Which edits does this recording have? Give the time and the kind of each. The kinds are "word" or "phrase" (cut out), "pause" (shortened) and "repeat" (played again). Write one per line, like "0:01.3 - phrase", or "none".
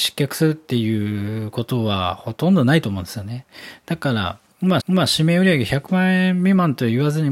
0:04.8 - repeat